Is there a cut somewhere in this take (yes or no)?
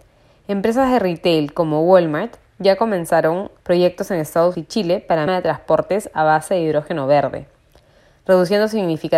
yes